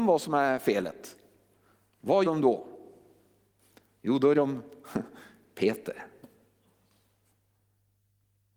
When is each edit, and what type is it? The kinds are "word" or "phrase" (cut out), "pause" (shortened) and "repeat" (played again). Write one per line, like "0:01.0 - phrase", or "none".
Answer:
0:02.2 - word
0:04.3 - word

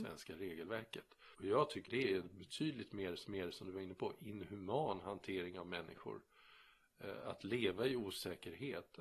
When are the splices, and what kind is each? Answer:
0:01.3 - pause
0:01.9 - word
0:03.2 - repeat

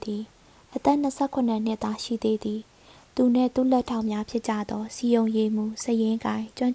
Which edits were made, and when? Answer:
none

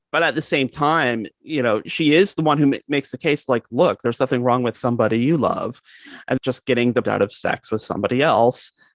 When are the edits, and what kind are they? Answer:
0:01.3 - pause
0:01.9 - word
0:04.7 - phrase
0:06.4 - word
0:07.0 - phrase

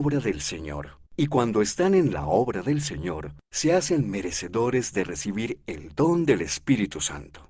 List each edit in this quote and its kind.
0:01.1 - pause
0:03.4 - pause

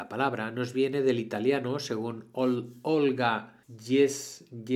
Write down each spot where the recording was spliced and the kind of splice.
0:03.6 - pause

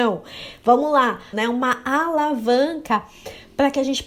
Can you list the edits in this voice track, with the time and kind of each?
0:01.3 - word

